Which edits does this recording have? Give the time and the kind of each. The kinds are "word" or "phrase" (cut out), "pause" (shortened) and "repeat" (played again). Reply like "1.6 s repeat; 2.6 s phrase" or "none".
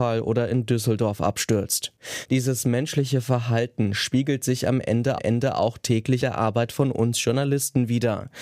5.2 s repeat; 6.2 s word